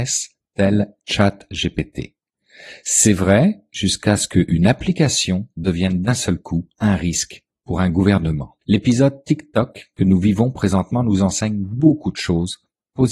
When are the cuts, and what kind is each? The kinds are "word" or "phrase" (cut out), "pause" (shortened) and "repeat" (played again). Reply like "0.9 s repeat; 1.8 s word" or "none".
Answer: 6.7 s pause; 8.6 s pause